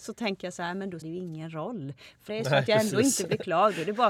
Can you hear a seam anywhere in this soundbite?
yes; 2 cuts; at 1.0 s, 2.3 s

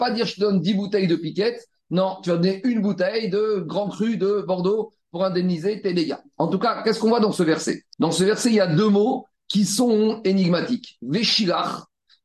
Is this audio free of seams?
no; 1 cut; at 7.9 s

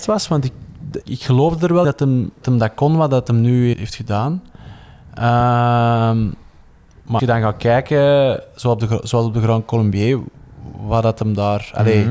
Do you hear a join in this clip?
yes; 5 cuts; at 1.0 s, 1.8 s, 2.4 s, 3.7 s, 7.2 s

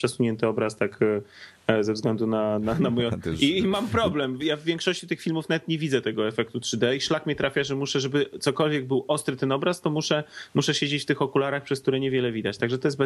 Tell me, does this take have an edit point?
no; 0 cuts

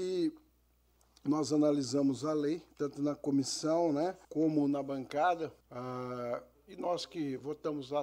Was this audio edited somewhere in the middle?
yes; 3 cuts; at 2.7 s, 4.2 s, 5.6 s

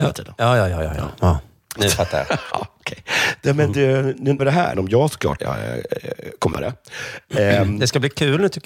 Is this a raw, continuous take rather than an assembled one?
no; 5 cuts; at 1.8 s, 4.4 s, 4.7 s, 5.4 s, 6.5 s

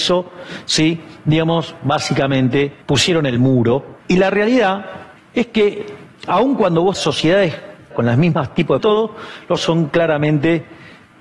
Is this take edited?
yes; 7 cuts; at 2.8 s, 4.0 s, 5.2 s, 6.9 s, 7.9 s, 8.8 s, 9.6 s

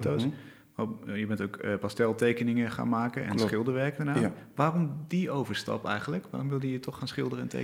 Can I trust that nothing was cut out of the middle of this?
yes; 0 cuts

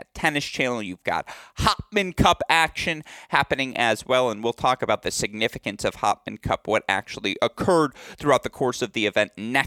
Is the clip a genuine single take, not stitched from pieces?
yes; 0 cuts

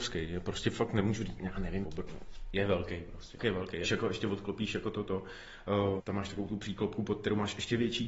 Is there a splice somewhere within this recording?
yes; 4 cuts; at 1.8 s, 3.4 s, 3.8 s, 6.0 s

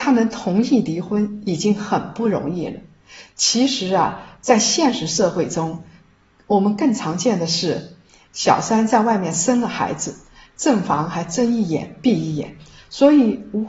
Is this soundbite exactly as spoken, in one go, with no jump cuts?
yes; 0 cuts

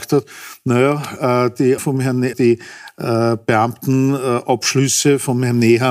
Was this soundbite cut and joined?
yes; 2 cuts; at 1.8 s, 2.3 s

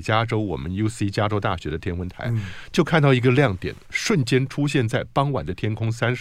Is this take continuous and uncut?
yes; 0 cuts

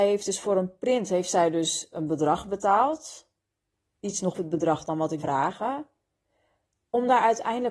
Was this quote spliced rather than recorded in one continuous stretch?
yes; 3 cuts; at 3.7 s, 4.3 s, 5.2 s

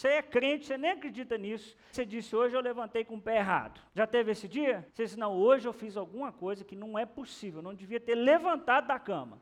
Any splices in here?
yes; 3 cuts; at 1.9 s, 3.9 s, 4.9 s

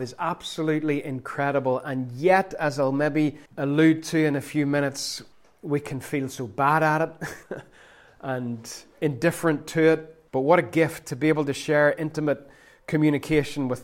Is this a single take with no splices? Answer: no; 4 cuts; at 3.5 s, 5.3 s, 7.4 s, 10.3 s

